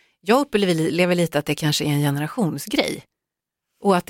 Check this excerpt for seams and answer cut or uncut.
uncut